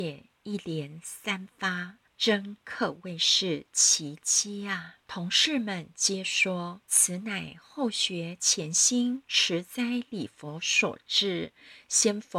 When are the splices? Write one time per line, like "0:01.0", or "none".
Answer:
0:02.1
0:05.0
0:06.8